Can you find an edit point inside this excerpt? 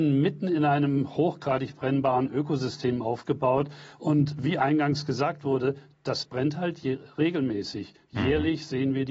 no; 0 cuts

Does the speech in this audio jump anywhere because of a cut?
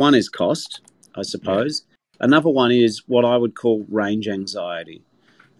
no; 0 cuts

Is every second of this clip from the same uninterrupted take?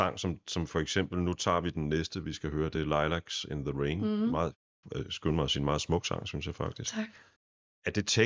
yes; 0 cuts

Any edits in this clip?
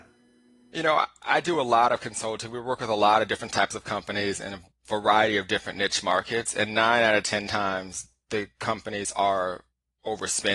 no; 0 cuts

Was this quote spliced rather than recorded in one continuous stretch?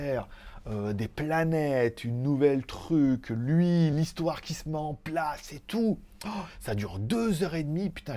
no; 0 cuts

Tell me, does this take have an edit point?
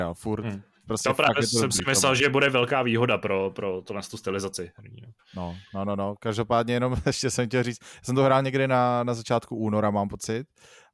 no; 0 cuts

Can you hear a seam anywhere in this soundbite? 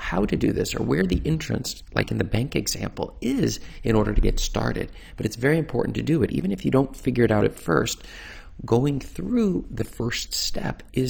no; 0 cuts

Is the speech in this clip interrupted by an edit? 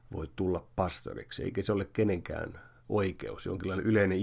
no; 0 cuts

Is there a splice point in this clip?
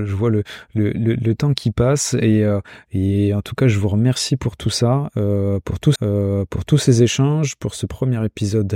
yes; 1 cut; at 6.0 s

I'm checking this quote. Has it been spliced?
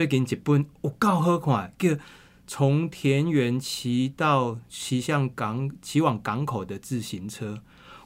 no; 0 cuts

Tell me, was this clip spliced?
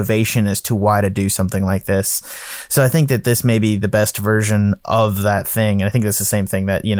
no; 0 cuts

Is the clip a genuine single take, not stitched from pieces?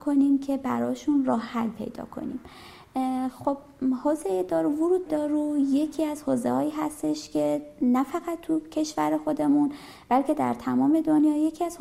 no; 1 cut; at 5.1 s

